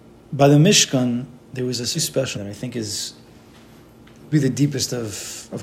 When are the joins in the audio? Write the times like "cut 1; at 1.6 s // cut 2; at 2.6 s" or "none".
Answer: cut 1; at 1.9 s // cut 2; at 2.3 s // cut 3; at 4.3 s